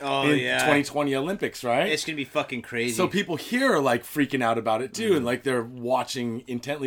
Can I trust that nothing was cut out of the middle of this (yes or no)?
yes